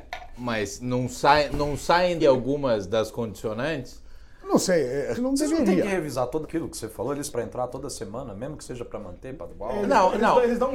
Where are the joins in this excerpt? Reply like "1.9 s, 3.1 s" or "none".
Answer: 1.5 s, 2.2 s, 5.1 s, 6.4 s, 7.3 s, 9.5 s